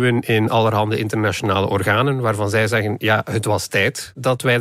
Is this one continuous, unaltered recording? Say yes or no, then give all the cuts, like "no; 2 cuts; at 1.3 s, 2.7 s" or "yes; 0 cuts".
yes; 0 cuts